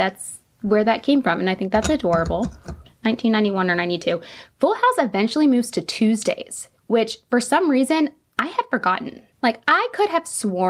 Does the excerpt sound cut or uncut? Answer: cut